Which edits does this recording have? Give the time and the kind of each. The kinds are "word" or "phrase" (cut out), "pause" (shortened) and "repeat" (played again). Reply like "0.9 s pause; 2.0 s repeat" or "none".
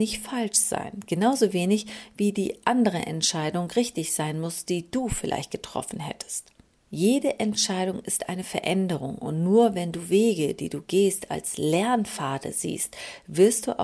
none